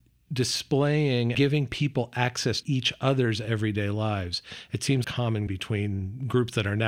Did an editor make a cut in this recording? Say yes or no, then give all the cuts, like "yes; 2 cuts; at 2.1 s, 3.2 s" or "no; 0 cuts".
yes; 4 cuts; at 1.3 s, 2.6 s, 5.0 s, 5.5 s